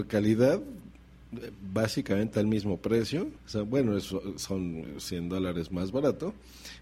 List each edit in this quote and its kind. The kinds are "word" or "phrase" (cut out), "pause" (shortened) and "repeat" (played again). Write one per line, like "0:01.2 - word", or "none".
0:03.4 - pause